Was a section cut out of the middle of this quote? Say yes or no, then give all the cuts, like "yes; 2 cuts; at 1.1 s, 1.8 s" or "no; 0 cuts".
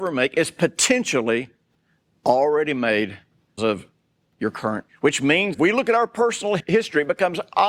yes; 3 cuts; at 3.6 s, 4.9 s, 5.5 s